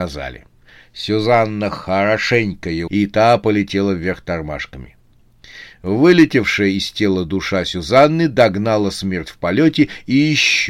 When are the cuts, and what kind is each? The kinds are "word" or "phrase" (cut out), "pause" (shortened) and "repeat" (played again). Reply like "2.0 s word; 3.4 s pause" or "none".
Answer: 2.9 s word